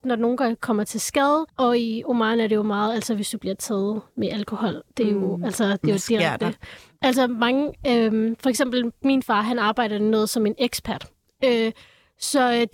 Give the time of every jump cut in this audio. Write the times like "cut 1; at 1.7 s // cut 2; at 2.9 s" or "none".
cut 1; at 1.5 s